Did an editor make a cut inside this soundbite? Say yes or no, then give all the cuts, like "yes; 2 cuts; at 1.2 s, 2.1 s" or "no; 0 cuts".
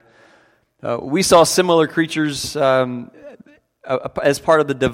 no; 0 cuts